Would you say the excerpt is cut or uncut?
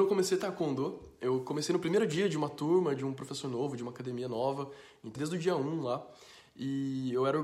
cut